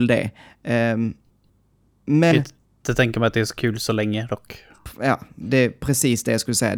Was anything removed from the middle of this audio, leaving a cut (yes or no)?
yes